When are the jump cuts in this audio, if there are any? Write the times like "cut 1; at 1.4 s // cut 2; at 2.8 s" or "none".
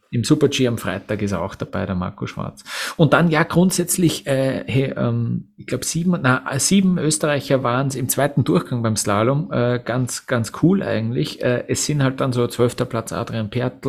none